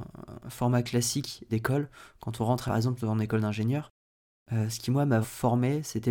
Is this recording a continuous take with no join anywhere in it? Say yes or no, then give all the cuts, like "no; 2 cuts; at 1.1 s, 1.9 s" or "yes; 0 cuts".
no; 3 cuts; at 1.5 s, 2.7 s, 5.2 s